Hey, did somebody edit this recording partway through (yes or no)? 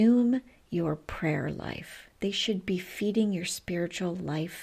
no